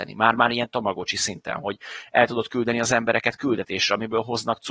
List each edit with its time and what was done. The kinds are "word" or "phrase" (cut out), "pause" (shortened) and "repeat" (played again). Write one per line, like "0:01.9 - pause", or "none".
none